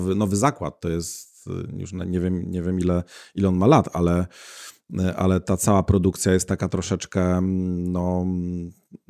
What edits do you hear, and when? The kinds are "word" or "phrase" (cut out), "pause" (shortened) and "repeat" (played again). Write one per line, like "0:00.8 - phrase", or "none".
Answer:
none